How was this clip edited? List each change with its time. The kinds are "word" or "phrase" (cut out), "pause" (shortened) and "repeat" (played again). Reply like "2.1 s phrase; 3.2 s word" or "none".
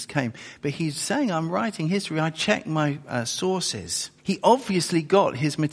4.2 s pause